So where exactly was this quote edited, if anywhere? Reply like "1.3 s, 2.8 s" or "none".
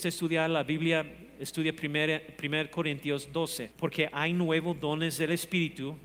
3.7 s